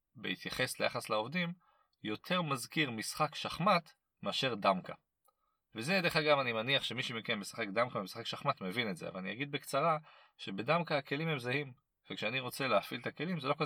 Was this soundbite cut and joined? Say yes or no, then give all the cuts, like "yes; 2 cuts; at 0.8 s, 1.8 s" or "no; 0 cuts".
no; 0 cuts